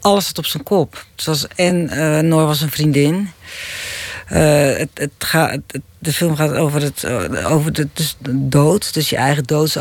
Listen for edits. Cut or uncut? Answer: uncut